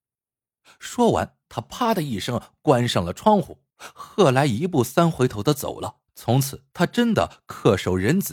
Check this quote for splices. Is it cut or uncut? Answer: cut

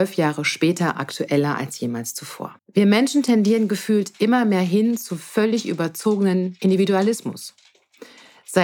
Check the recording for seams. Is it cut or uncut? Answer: cut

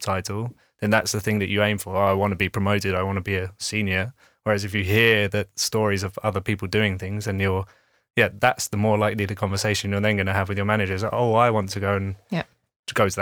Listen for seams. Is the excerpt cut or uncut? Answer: uncut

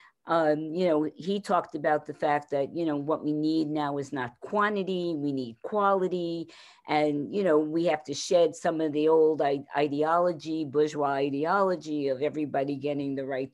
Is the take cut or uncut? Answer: uncut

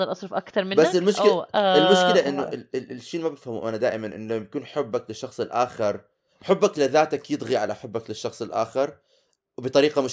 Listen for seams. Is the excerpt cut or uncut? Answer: uncut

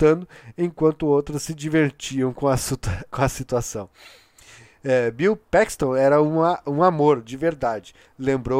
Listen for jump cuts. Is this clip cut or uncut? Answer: uncut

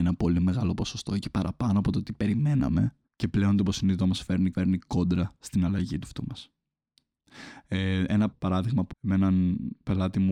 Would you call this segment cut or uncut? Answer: cut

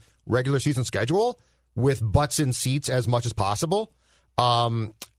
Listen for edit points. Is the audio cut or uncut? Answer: uncut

